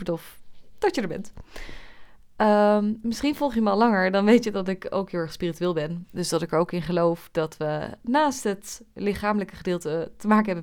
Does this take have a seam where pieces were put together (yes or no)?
no